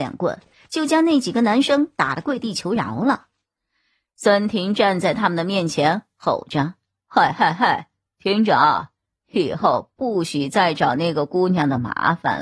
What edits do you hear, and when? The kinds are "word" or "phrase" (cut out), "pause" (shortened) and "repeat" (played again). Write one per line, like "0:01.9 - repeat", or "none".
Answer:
none